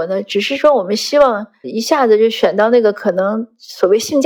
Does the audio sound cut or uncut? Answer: cut